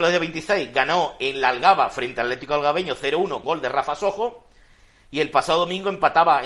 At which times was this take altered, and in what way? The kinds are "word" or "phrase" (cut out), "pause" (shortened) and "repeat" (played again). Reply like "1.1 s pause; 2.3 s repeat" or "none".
3.4 s word